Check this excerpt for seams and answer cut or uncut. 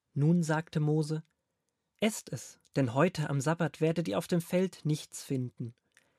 uncut